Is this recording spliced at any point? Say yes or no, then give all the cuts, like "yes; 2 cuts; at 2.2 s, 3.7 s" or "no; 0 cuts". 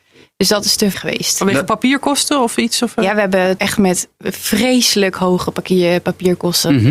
yes; 2 cuts; at 0.9 s, 3.6 s